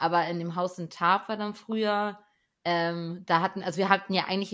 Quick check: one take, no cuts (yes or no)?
yes